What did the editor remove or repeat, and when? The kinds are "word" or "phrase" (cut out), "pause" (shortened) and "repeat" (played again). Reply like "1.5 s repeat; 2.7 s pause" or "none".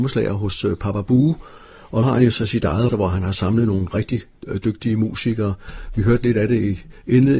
2.0 s word; 2.9 s word